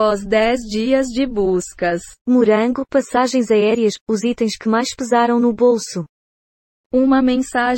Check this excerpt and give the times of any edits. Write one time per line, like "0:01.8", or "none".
0:02.2